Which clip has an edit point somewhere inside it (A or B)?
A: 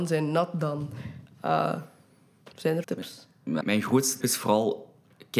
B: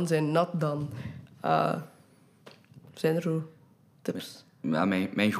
A